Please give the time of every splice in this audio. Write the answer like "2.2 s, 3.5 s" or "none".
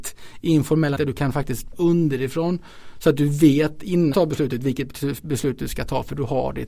1.0 s, 1.7 s, 4.1 s